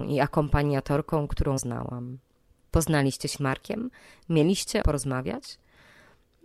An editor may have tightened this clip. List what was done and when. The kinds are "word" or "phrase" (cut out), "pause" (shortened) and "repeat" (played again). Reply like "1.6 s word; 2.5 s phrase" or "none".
1.6 s word; 3.3 s word; 4.8 s word